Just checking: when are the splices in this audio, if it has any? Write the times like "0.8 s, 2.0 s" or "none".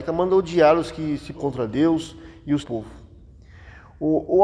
1.3 s, 2.6 s